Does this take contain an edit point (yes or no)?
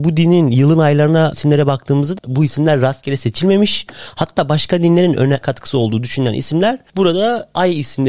yes